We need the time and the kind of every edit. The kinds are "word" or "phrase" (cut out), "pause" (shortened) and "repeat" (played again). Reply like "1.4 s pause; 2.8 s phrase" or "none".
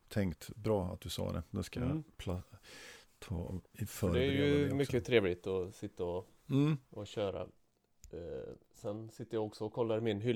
3.7 s pause; 6.4 s pause; 8.6 s pause